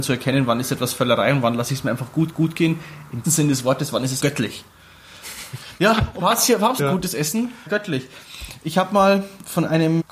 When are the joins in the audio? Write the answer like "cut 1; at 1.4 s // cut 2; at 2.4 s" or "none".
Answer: cut 1; at 2.3 s // cut 2; at 3.2 s // cut 3; at 4.2 s // cut 4; at 6.2 s // cut 5; at 6.8 s // cut 6; at 7.7 s